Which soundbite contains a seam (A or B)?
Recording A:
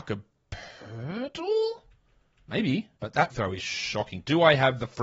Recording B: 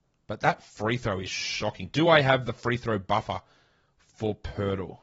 A